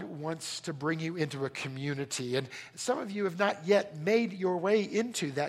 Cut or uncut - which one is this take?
uncut